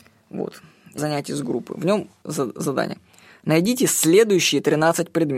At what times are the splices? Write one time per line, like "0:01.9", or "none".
0:01.0
0:02.2